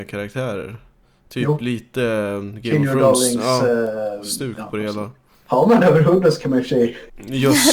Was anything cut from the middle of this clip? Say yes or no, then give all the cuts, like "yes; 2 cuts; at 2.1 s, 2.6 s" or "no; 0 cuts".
no; 0 cuts